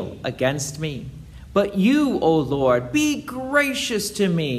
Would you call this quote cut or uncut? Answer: uncut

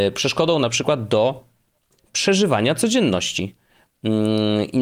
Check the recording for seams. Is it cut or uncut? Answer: uncut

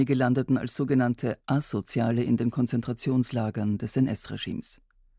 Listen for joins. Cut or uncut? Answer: uncut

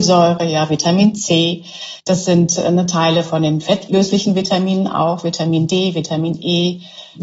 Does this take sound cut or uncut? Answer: cut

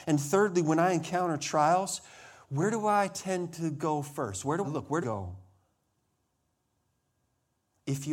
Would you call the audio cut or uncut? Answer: cut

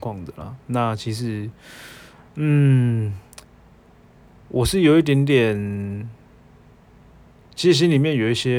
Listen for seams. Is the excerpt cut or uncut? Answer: uncut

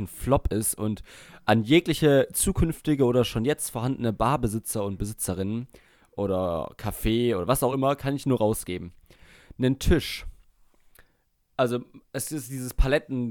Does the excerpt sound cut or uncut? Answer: uncut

